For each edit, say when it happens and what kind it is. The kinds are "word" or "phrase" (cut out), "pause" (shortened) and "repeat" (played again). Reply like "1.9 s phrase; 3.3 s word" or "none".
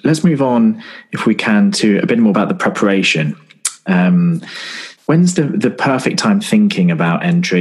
2.3 s word; 5.0 s pause; 6.4 s phrase